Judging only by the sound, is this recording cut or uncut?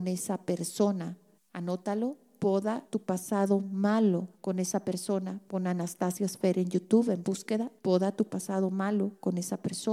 cut